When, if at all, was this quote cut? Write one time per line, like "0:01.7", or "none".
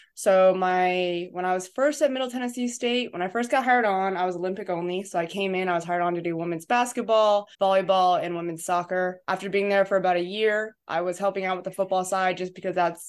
0:07.5
0:09.2